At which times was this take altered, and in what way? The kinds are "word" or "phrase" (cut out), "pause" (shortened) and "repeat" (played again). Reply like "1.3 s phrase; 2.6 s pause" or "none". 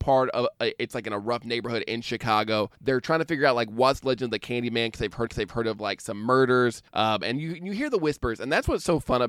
2.8 s pause; 5.3 s repeat; 6.9 s pause